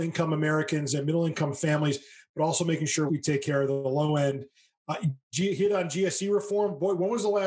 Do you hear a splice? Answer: yes; 1 cut; at 3.1 s

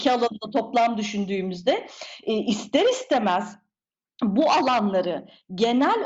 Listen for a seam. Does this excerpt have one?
no; 0 cuts

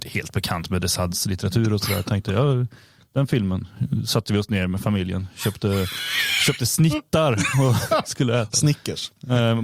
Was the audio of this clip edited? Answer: no; 0 cuts

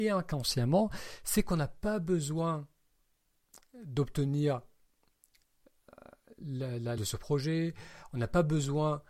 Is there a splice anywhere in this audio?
yes; 1 cut; at 7.0 s

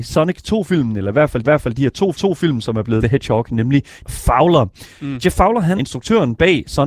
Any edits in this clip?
yes; 5 cuts; at 1.4 s, 2.1 s, 3.0 s, 4.0 s, 5.8 s

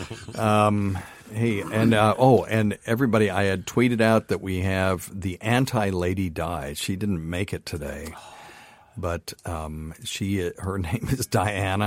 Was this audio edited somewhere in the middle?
no; 0 cuts

